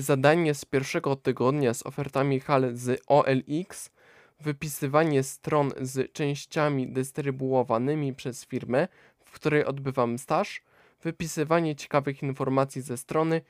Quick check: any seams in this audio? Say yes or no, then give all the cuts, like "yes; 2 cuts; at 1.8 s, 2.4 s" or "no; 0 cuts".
no; 0 cuts